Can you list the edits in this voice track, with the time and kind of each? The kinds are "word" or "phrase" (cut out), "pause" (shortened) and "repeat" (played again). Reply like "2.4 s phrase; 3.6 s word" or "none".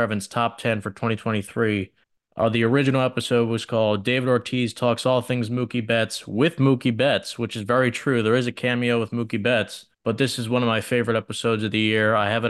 2.0 s pause; 9.9 s pause

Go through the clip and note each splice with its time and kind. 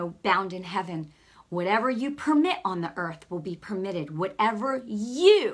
none

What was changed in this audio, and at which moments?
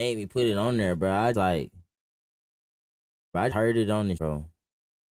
1.3 s word; 3.5 s word; 4.2 s word

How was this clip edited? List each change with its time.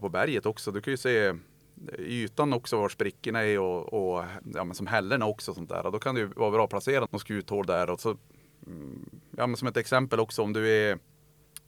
7.1 s word

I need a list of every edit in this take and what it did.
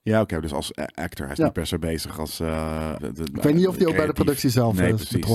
3.0 s word

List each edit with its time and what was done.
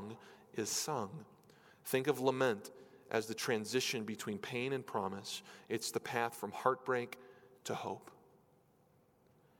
none

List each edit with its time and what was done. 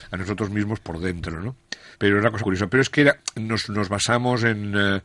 1.9 s pause; 2.4 s word

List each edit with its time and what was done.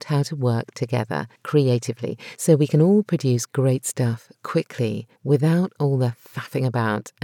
1.4 s pause; 5.2 s pause

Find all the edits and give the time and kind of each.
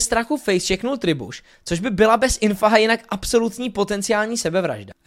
none

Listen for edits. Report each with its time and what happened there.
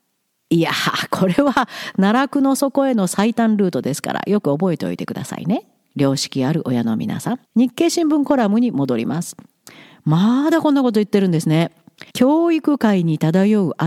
7.4 s pause; 12.1 s pause

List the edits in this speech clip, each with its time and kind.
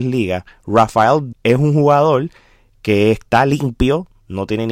1.3 s word

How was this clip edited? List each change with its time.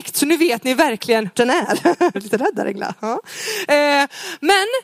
1.3 s word; 2.1 s word

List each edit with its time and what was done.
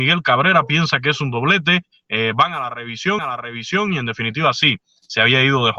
3.2 s repeat

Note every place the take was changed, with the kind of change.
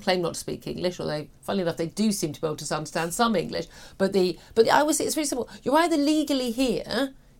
4.6 s word

